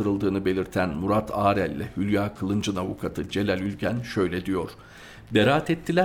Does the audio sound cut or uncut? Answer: uncut